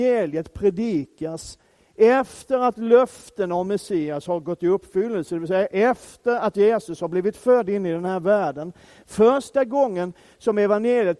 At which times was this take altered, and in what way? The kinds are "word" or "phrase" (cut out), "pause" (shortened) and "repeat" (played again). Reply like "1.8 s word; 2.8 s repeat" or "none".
none